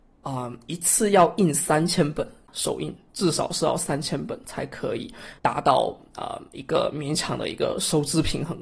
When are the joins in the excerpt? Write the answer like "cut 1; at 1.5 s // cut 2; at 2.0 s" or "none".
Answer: cut 1; at 5.4 s